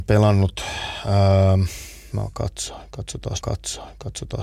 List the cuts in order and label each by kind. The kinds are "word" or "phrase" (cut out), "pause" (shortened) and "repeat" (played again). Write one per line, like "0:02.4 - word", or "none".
0:02.1 - word
0:03.4 - repeat